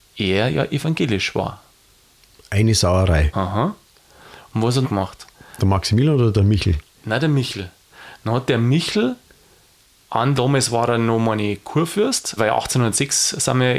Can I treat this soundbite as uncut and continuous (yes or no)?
no